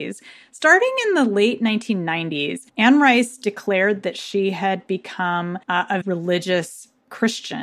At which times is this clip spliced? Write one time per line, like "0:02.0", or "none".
0:02.7
0:05.6
0:06.0